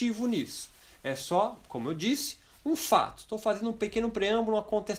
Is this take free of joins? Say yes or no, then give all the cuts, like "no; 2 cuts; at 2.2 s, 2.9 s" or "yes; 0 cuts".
yes; 0 cuts